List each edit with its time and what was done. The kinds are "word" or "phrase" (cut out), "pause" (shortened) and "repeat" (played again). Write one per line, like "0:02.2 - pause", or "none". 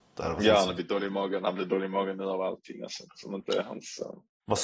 none

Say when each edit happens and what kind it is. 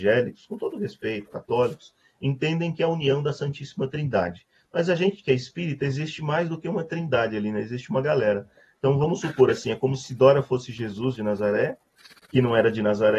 none

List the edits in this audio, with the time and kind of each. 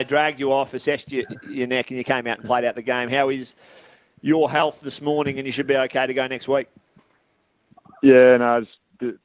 none

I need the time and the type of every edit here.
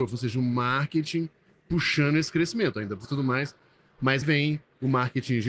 0:03.0 - phrase
0:04.2 - word

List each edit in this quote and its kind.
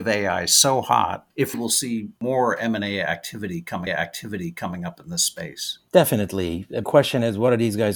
0:01.5 - word
0:03.9 - repeat
0:06.8 - word

